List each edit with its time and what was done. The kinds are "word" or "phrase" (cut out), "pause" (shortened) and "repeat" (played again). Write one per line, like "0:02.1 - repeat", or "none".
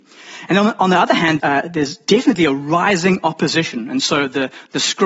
0:01.4 - word